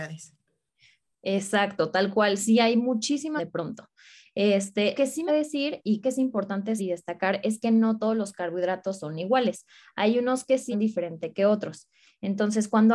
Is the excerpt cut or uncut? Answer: cut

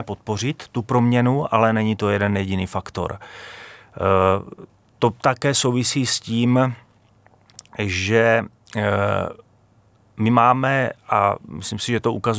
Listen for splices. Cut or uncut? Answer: uncut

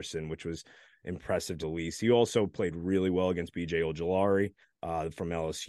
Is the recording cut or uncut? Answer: cut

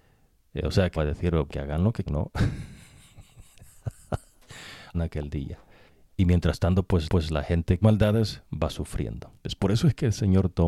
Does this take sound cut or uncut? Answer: cut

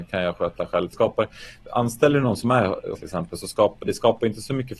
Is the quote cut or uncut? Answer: cut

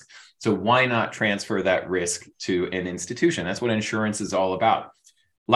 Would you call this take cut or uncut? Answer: uncut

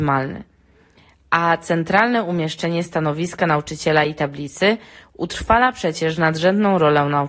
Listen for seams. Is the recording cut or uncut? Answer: uncut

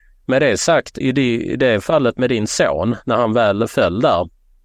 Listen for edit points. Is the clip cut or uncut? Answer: cut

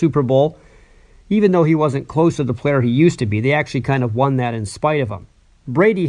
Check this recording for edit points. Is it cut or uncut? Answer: uncut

